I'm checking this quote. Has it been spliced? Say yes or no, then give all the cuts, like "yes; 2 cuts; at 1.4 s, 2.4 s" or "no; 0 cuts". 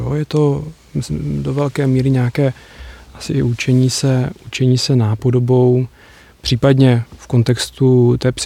yes; 1 cut; at 7.1 s